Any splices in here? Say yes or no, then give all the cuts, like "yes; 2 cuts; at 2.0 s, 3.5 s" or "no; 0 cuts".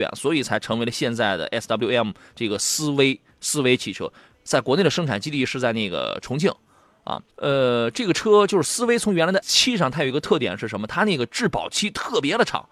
yes; 2 cuts; at 7.3 s, 9.4 s